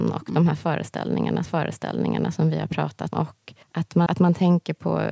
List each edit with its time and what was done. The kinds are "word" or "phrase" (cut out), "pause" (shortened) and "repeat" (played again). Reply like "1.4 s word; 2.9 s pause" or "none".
1.5 s repeat; 3.1 s word; 3.6 s pause; 4.1 s word